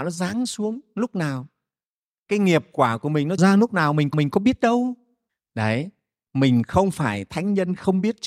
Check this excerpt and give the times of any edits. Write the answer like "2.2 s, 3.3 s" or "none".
3.4 s, 4.1 s, 5.3 s

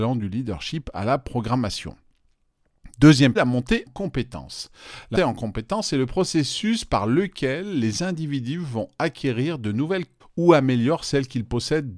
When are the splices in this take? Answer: 3.4 s, 3.9 s, 5.1 s, 10.2 s

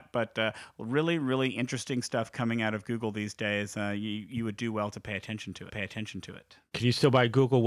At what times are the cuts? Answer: 5.7 s

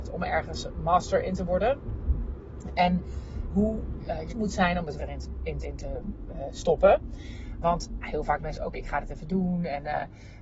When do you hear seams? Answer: 3.5 s, 4.3 s, 5.0 s, 5.6 s, 8.0 s, 8.4 s, 8.7 s

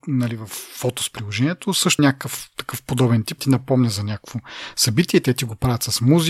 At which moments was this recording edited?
2.0 s, 3.4 s

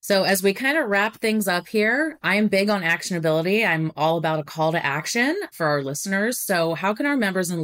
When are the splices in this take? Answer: none

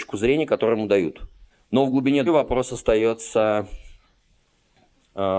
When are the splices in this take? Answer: 1.5 s, 2.3 s

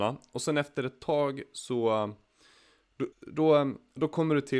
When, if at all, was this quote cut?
3.1 s

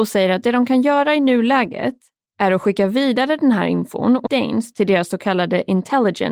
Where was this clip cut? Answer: 4.3 s

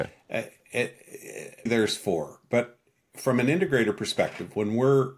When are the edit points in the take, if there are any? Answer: 1.7 s

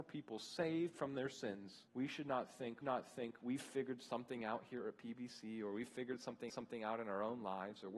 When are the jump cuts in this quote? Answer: 1.9 s, 2.8 s, 6.5 s

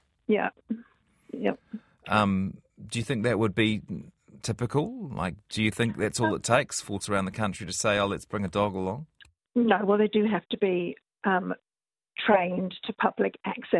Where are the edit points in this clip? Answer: 7.0 s

